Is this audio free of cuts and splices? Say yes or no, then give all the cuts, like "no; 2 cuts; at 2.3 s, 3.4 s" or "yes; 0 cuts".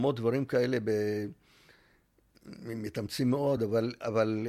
yes; 0 cuts